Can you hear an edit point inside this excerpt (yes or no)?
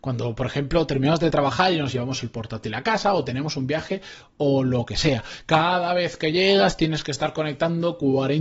no